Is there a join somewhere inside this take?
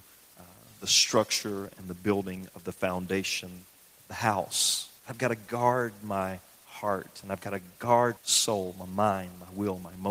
yes; 2 cuts; at 5.0 s, 8.2 s

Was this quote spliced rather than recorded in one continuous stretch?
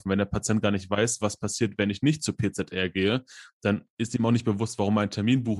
no; 0 cuts

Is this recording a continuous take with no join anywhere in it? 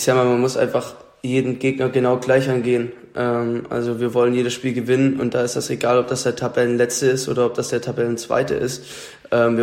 yes; 0 cuts

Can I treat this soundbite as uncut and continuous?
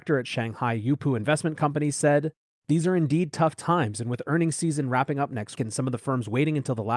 no; 1 cut; at 5.5 s

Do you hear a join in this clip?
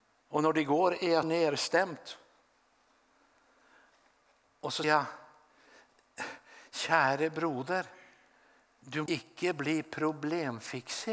yes; 3 cuts; at 1.2 s, 4.8 s, 9.1 s

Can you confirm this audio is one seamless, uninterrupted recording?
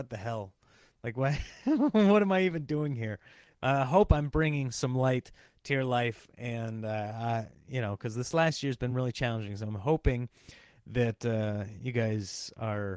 yes; 0 cuts

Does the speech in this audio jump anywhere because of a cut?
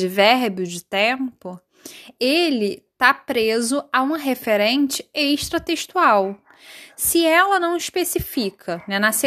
no; 0 cuts

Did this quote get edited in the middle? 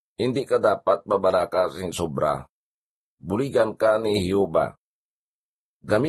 no; 0 cuts

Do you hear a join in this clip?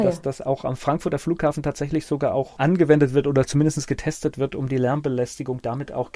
no; 0 cuts

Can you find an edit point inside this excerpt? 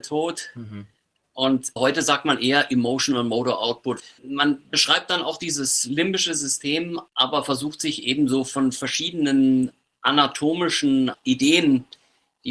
no; 0 cuts

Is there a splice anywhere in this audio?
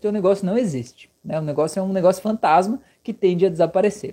no; 0 cuts

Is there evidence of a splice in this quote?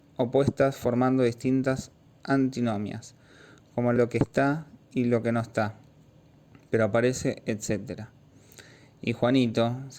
yes; 1 cut; at 4.0 s

